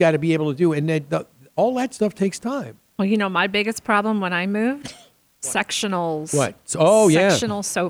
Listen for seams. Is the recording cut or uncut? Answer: uncut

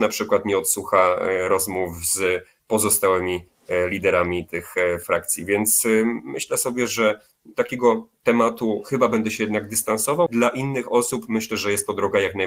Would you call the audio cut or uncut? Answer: cut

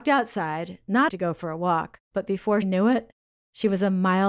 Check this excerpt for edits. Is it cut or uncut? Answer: cut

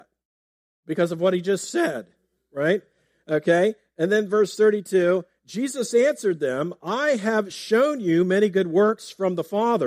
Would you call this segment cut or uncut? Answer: uncut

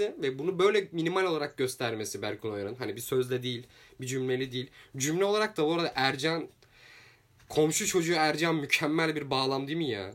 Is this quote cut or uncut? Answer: uncut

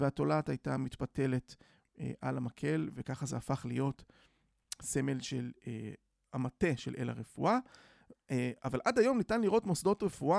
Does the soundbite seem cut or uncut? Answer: uncut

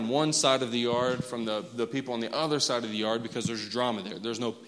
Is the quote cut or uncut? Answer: uncut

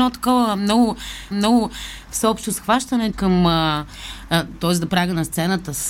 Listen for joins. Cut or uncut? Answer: cut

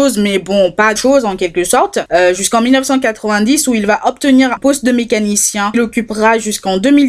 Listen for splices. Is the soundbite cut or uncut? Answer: cut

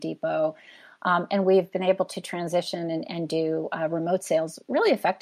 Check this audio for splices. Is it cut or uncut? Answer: uncut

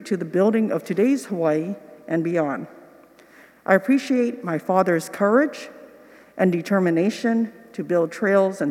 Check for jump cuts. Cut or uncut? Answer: uncut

